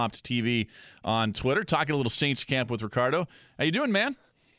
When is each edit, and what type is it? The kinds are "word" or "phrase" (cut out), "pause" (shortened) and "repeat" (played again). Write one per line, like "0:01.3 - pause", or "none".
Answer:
none